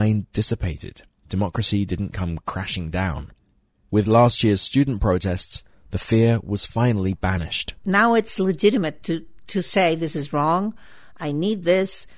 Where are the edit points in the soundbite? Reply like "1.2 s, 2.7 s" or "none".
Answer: none